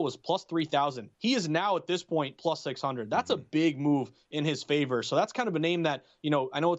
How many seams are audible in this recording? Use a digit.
1